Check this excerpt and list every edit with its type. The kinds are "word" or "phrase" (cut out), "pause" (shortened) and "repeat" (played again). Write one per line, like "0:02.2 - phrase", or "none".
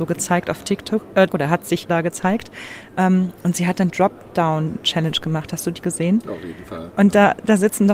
0:01.3 - word
0:01.9 - word
0:03.9 - word

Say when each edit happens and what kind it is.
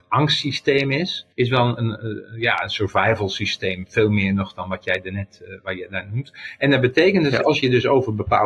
0:01.3 - pause
0:01.8 - word

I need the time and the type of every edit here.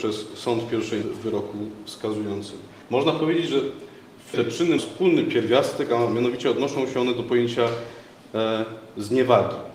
0:01.0 - word
0:02.8 - pause
0:04.3 - word
0:04.8 - word

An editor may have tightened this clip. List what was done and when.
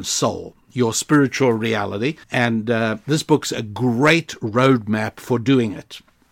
0:02.2 - pause

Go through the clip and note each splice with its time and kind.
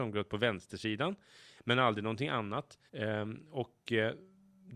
0:02.9 - pause

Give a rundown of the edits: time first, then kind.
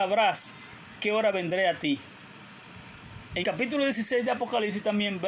0:01.0 - word
0:03.4 - word

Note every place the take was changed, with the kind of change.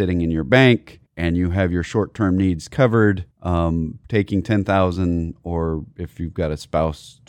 0:01.1 - pause
0:03.3 - pause

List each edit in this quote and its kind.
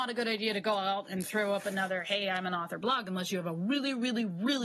none

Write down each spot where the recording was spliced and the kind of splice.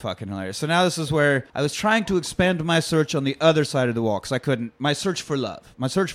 0:01.5 - pause

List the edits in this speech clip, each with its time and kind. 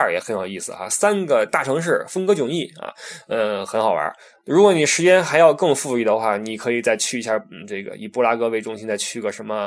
none

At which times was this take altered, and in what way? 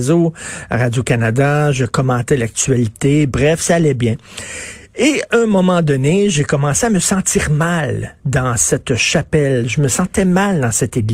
none

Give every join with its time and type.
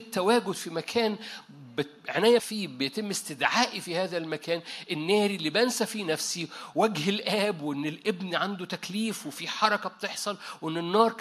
0:02.4 - word
0:06.7 - word

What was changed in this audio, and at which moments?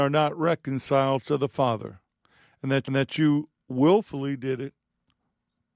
0:02.9 - repeat

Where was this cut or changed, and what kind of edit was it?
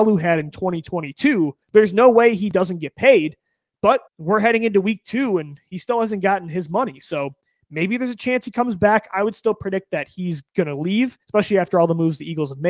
0:01.6 - pause
0:04.1 - pause
0:10.5 - pause
0:11.2 - pause

